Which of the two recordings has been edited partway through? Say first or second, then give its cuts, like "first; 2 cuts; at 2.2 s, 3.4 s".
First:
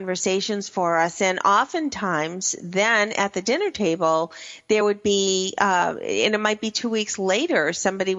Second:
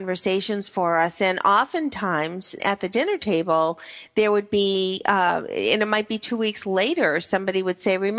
second; 1 cut; at 2.6 s